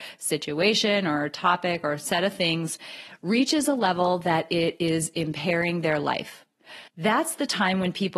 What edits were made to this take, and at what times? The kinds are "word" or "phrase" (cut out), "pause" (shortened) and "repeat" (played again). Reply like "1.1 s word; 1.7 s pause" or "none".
6.9 s pause